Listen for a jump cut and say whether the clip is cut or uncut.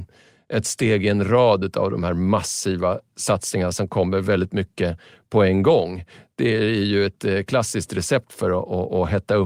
uncut